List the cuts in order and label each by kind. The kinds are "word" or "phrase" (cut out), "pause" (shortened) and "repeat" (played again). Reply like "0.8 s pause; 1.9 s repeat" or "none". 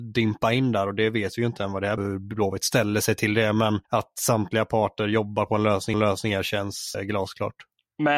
2.0 s phrase; 3.8 s pause; 5.9 s repeat; 6.9 s word